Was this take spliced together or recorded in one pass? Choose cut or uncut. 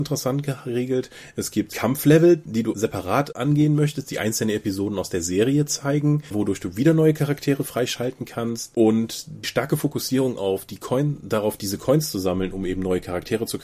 cut